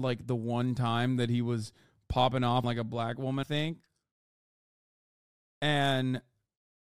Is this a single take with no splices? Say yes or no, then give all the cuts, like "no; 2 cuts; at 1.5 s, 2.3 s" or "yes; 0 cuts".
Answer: no; 2 cuts; at 2.6 s, 3.4 s